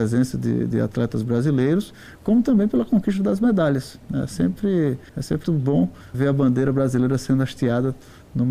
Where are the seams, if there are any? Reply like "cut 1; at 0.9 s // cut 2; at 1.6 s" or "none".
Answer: cut 1; at 5.1 s // cut 2; at 5.4 s // cut 3; at 6.1 s